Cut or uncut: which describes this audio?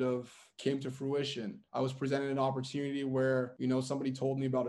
uncut